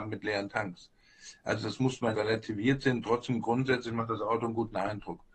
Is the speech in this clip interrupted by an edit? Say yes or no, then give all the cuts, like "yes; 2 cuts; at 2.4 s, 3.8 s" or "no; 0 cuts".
yes; 1 cut; at 2.1 s